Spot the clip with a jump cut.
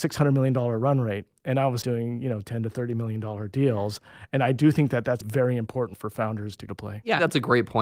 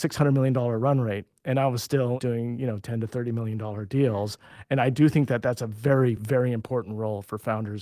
first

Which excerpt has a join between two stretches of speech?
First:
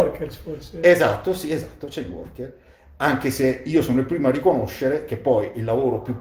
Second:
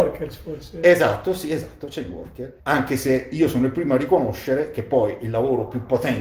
second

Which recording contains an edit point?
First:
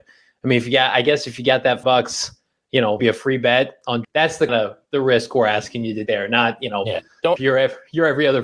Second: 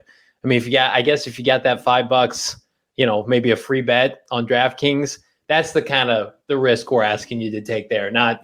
first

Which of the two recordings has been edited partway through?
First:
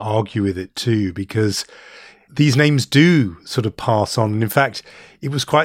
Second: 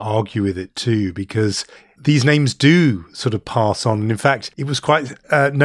second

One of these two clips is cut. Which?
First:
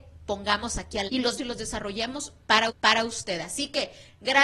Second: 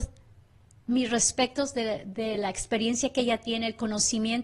first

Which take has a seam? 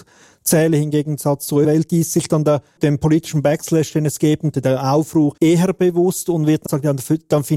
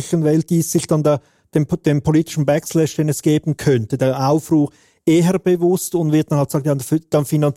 first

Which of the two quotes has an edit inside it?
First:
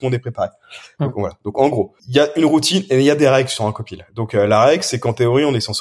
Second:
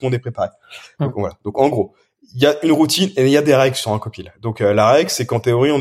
first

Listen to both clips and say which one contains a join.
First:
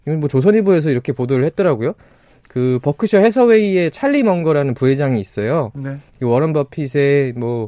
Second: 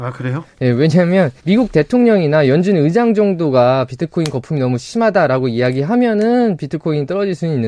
second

